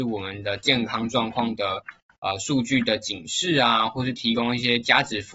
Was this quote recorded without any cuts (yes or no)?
yes